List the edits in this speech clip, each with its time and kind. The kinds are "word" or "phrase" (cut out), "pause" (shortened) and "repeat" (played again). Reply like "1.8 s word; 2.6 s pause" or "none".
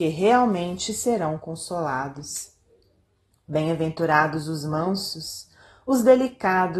none